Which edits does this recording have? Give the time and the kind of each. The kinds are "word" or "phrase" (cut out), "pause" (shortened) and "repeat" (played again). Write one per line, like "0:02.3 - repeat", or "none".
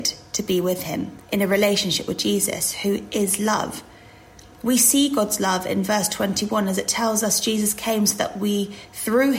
0:01.2 - pause